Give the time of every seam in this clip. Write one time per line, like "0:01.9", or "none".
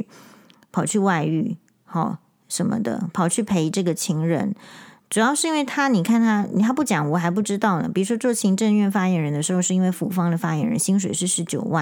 none